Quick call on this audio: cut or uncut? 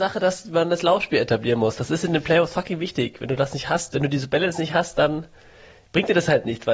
uncut